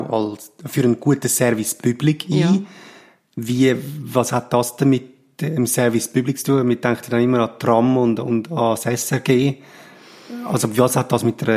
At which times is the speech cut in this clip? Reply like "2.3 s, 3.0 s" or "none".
none